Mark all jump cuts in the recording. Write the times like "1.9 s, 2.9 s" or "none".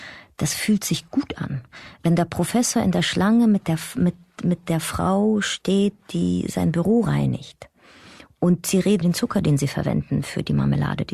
9.0 s